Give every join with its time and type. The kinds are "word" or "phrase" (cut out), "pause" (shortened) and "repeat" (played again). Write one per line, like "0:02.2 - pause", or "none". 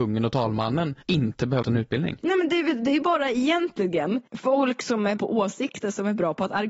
0:01.0 - pause
0:01.6 - phrase
0:04.3 - pause
0:05.2 - word